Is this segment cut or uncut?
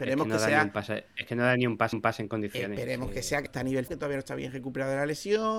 cut